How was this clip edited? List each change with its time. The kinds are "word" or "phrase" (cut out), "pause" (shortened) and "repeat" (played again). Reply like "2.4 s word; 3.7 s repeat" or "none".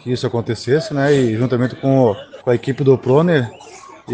2.4 s pause